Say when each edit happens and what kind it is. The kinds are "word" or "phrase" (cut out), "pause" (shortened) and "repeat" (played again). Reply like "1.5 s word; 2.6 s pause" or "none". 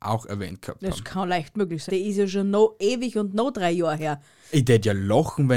1.9 s word